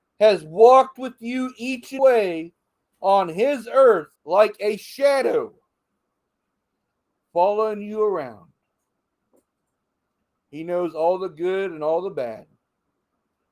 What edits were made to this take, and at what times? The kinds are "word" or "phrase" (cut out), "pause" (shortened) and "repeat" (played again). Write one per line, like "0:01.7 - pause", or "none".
0:02.0 - phrase
0:04.2 - pause